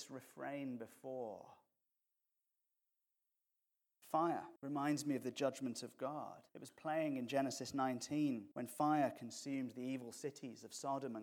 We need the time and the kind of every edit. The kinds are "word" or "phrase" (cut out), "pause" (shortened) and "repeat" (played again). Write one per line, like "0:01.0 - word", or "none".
0:04.6 - pause
0:06.5 - pause
0:08.5 - pause